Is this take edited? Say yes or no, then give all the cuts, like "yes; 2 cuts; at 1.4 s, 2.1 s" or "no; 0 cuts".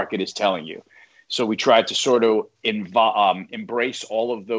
no; 0 cuts